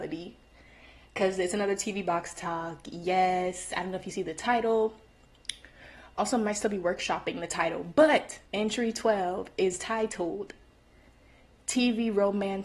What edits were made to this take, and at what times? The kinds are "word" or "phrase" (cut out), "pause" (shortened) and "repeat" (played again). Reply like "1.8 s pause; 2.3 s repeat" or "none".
8.5 s pause